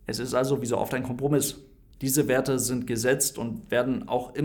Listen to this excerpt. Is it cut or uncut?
uncut